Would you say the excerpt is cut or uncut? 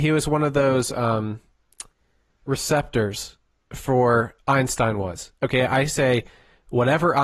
cut